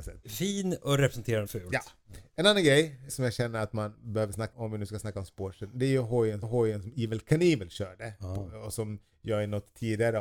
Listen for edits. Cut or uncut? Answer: cut